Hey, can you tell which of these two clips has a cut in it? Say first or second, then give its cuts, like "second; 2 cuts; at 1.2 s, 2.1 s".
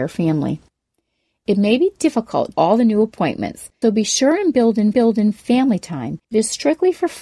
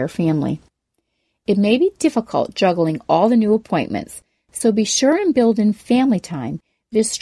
first; 4 cuts; at 2.5 s, 3.8 s, 4.9 s, 6.2 s